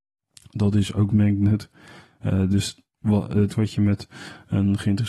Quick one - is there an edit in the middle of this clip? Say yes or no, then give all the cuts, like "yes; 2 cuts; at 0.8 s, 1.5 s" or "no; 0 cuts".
yes; 3 cuts; at 1.1 s, 2.9 s, 3.5 s